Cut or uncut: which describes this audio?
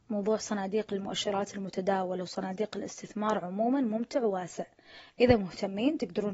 uncut